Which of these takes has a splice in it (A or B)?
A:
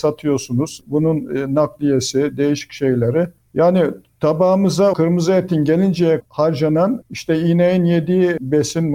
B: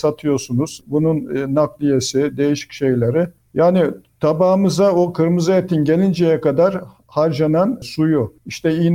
A